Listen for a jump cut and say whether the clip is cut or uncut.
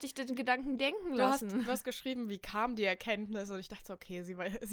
uncut